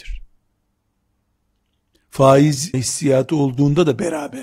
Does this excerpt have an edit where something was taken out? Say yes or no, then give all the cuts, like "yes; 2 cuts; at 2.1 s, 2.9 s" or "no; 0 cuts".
yes; 1 cut; at 2.7 s